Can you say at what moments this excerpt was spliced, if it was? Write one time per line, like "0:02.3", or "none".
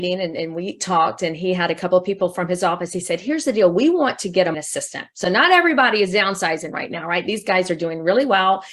0:04.5